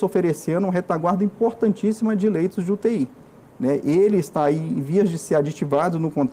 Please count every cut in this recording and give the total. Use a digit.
0